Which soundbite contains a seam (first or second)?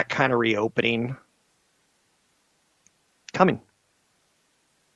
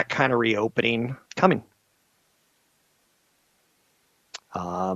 second